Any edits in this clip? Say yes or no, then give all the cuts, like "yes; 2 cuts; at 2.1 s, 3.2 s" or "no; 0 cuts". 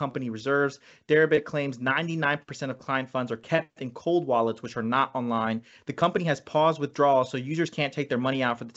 no; 0 cuts